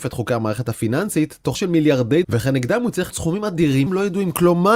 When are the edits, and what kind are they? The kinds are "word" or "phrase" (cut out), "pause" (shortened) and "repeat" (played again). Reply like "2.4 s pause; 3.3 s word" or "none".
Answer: 1.5 s word; 2.2 s word; 3.1 s word; 3.9 s word